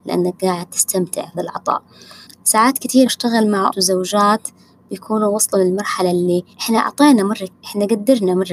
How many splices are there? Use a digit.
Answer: 6